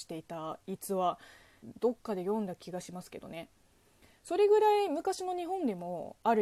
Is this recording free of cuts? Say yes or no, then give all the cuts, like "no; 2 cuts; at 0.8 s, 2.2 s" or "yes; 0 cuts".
yes; 0 cuts